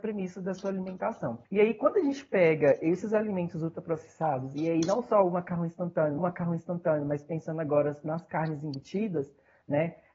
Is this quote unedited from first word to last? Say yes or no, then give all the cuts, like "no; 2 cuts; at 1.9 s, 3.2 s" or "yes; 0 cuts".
no; 2 cuts; at 1.4 s, 6.2 s